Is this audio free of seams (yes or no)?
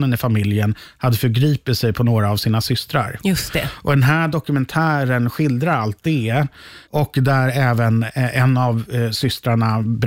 no